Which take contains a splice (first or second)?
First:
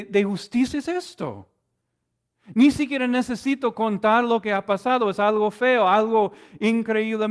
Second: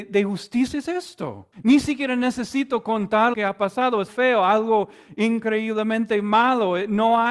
second